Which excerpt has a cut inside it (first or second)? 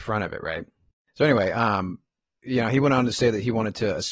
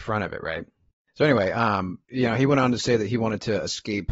second